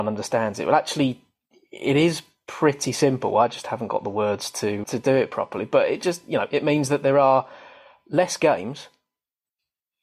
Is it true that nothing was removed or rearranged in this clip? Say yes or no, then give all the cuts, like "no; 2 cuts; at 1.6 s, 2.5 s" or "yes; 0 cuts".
no; 1 cut; at 4.8 s